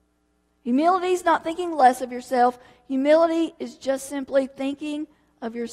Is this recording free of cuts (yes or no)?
yes